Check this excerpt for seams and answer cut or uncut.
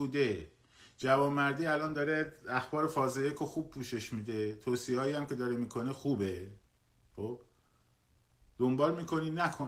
uncut